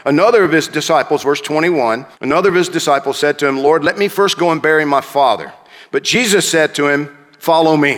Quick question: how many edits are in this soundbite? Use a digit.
1